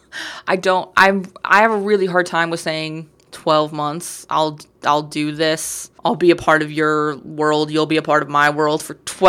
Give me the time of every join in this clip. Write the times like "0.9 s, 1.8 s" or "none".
6.0 s